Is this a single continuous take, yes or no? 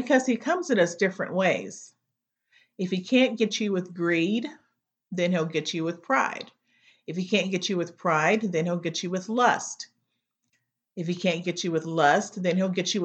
yes